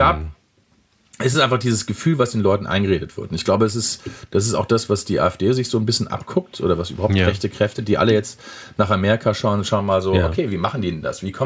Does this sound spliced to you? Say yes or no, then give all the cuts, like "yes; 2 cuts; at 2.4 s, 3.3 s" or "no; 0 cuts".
no; 0 cuts